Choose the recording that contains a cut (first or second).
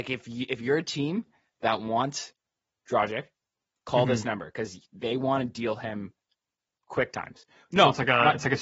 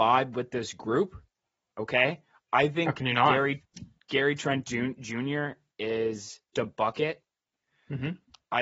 second